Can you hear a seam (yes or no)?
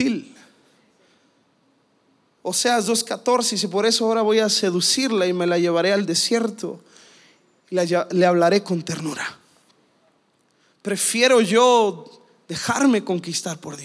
no